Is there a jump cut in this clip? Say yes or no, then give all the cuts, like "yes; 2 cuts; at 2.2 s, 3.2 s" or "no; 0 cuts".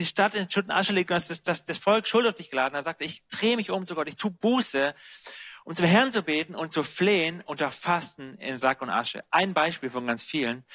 no; 0 cuts